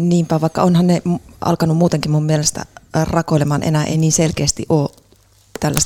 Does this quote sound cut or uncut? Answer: uncut